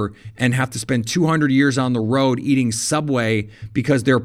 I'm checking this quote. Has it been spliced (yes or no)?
no